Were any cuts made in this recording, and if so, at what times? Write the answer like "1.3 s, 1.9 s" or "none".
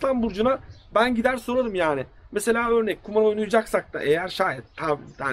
none